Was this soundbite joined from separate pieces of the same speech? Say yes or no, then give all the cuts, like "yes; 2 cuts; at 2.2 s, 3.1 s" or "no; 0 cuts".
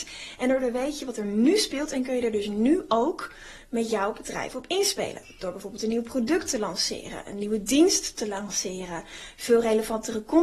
no; 0 cuts